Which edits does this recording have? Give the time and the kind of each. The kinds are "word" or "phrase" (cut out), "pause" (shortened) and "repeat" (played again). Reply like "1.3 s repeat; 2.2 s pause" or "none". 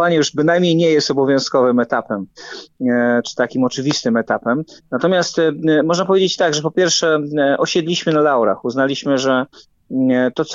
none